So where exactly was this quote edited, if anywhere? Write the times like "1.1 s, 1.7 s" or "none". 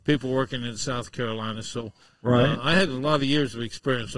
none